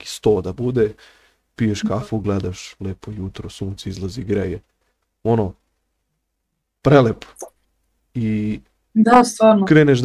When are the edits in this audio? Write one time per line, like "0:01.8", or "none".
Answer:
none